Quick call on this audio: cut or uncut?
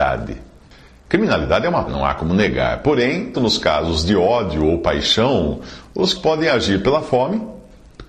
cut